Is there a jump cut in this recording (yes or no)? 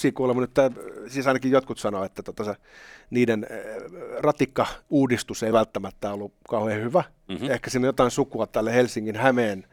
no